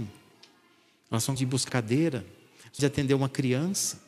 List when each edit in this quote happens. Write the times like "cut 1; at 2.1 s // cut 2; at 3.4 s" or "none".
cut 1; at 1.4 s // cut 2; at 1.7 s // cut 3; at 2.8 s